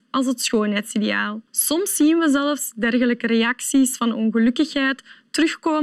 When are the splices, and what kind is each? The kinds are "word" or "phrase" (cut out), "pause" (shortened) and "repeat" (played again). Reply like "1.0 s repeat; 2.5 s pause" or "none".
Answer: 1.5 s pause